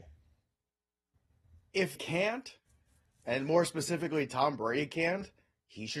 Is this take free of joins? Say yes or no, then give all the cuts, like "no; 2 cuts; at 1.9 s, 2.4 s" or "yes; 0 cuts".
no; 1 cut; at 2.0 s